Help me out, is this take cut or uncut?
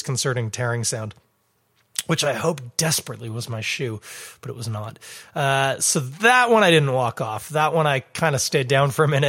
uncut